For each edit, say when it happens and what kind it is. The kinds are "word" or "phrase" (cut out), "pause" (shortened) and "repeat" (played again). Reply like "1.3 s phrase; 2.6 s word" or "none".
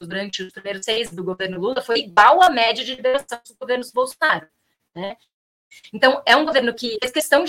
1.1 s word

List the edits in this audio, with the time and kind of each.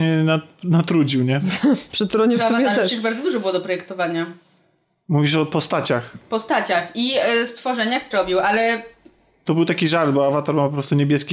8.1 s phrase

